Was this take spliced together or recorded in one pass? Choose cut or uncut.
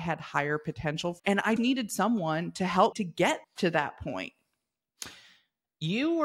cut